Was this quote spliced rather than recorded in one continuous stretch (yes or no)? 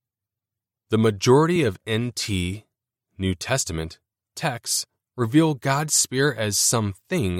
no